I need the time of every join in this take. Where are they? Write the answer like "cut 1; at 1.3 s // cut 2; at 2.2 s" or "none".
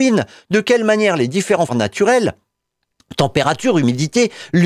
cut 1; at 1.7 s